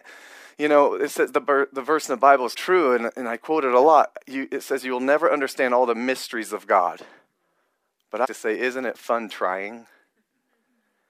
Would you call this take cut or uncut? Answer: cut